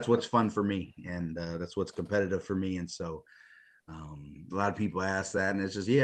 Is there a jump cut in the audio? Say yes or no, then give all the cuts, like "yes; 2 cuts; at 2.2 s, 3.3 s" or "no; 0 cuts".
no; 0 cuts